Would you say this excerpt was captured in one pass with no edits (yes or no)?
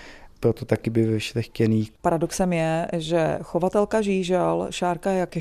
no